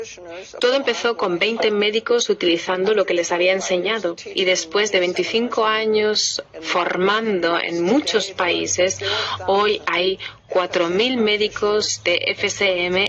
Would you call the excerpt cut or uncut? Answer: uncut